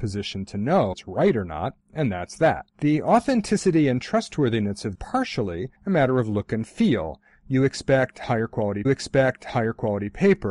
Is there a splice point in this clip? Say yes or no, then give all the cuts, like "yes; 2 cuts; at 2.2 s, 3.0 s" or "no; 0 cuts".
yes; 5 cuts; at 0.9 s, 2.7 s, 4.9 s, 5.7 s, 8.8 s